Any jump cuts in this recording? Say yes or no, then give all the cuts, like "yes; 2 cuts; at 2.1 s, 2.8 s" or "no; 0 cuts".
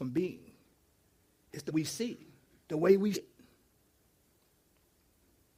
yes; 3 cuts; at 1.7 s, 2.5 s, 3.1 s